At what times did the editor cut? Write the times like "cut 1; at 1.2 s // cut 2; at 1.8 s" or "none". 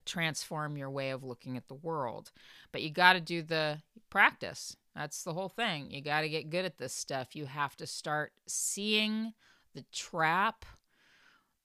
none